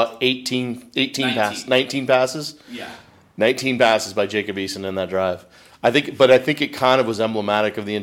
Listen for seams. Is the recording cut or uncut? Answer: uncut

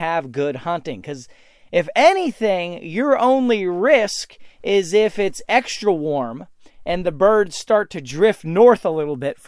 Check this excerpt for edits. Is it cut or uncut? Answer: uncut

